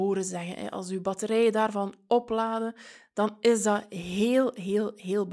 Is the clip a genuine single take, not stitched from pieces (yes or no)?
yes